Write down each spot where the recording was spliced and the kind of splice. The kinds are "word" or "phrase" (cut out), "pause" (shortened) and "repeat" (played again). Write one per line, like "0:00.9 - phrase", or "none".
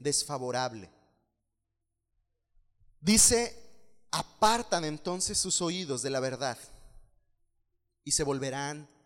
none